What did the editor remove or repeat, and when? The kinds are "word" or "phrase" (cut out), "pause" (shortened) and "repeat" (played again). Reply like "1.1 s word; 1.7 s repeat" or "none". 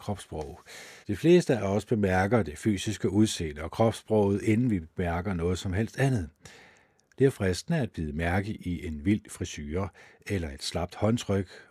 1.0 s pause